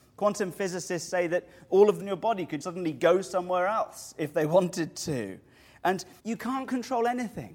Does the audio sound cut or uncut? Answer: cut